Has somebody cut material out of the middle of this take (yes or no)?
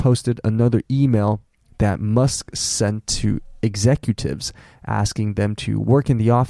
no